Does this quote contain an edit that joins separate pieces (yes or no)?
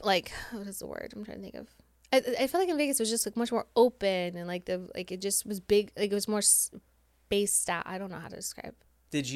no